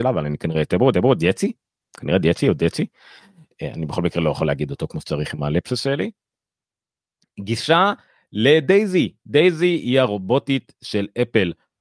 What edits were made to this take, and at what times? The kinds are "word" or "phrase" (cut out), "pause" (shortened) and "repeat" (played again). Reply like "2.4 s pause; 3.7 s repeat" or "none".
0.9 s repeat